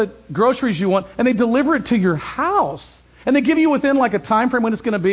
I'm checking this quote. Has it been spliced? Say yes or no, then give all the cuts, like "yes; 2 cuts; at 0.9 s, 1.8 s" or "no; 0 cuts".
no; 0 cuts